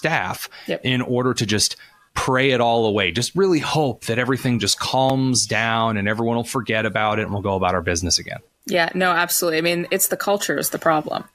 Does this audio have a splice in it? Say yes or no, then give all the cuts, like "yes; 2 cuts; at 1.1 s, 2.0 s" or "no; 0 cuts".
no; 0 cuts